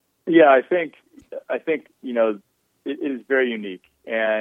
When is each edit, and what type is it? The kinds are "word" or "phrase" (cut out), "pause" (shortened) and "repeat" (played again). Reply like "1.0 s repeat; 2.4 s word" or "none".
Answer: none